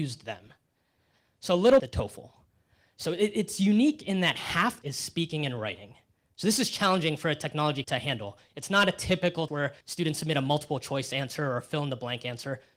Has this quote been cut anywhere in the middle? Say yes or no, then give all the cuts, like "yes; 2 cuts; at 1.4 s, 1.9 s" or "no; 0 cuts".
yes; 5 cuts; at 1.8 s, 4.8 s, 7.8 s, 9.5 s, 9.8 s